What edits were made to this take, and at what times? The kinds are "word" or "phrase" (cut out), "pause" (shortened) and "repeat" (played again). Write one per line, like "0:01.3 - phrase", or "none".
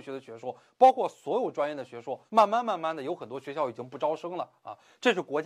0:02.3 - pause